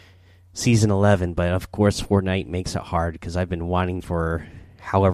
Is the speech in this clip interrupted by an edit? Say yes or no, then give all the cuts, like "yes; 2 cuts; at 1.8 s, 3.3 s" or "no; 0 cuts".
yes; 1 cut; at 4.0 s